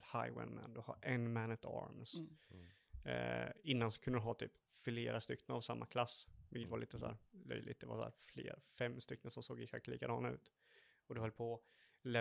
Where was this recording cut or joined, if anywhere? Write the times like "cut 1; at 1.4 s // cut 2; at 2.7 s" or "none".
none